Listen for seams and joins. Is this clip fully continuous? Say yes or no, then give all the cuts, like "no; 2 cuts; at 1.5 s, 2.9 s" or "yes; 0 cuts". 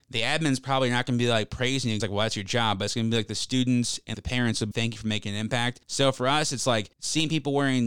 no; 5 cuts; at 2.0 s, 4.1 s, 4.7 s, 5.8 s, 6.9 s